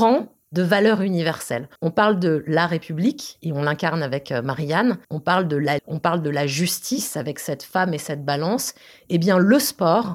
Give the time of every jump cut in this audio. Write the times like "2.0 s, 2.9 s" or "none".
1.8 s, 5.0 s, 5.8 s

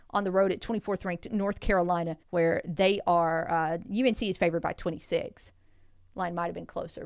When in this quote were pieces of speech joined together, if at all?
2.2 s

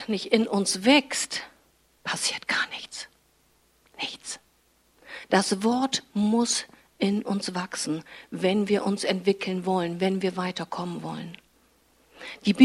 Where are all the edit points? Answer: 1.7 s

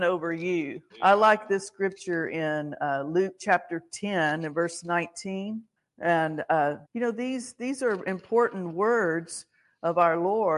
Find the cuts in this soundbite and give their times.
0.9 s, 5.8 s, 6.8 s

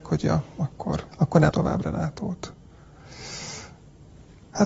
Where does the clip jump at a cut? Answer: 1.1 s, 1.5 s

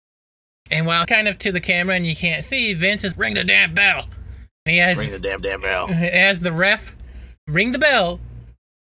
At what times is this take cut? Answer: 1.0 s, 3.1 s, 4.7 s, 5.4 s, 7.4 s

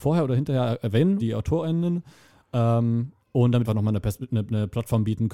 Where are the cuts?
1.2 s, 3.2 s, 3.7 s

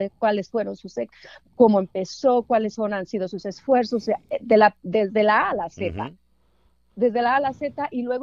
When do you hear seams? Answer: none

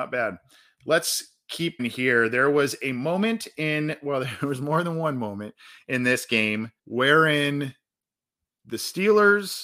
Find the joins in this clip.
1.8 s, 6.8 s

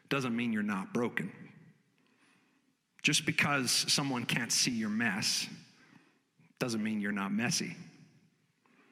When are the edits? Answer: none

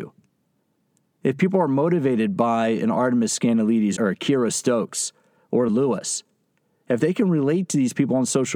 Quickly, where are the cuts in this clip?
4.0 s, 5.7 s

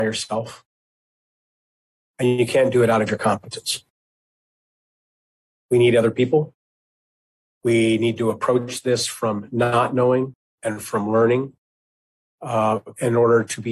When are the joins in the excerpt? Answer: none

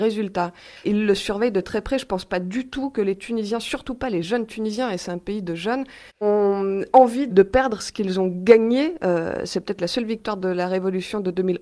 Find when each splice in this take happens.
none

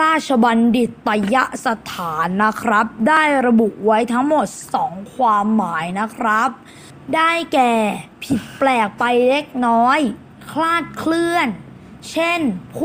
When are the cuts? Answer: 8.1 s

